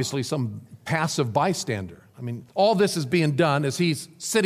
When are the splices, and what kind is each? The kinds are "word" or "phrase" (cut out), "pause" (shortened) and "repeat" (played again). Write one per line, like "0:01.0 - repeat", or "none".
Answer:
0:02.5 - pause

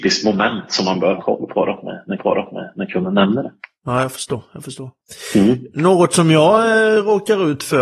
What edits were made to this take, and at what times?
0:01.2 - word
0:02.2 - repeat

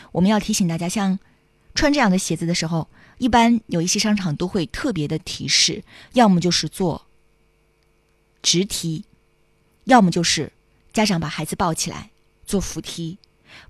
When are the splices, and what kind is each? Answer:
none

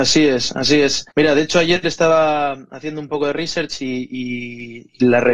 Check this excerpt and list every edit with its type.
0:01.1 - pause

